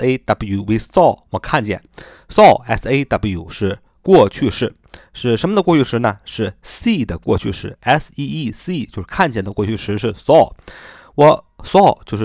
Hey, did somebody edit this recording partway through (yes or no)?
no